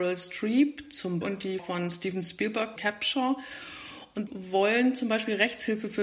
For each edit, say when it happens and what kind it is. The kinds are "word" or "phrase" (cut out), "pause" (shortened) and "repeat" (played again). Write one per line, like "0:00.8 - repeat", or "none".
0:01.2 - word
0:01.6 - word
0:02.8 - word
0:04.3 - word